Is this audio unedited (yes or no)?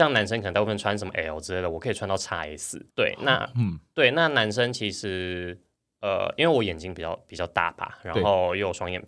no